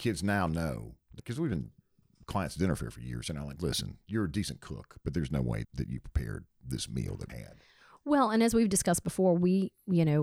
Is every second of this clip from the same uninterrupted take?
no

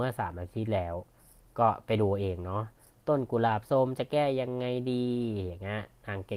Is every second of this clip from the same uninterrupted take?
yes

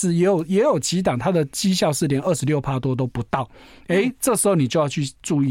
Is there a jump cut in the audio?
no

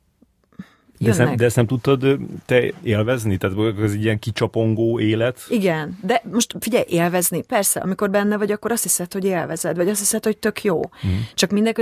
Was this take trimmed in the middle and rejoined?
no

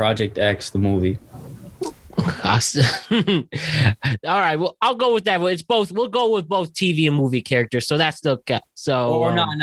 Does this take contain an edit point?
no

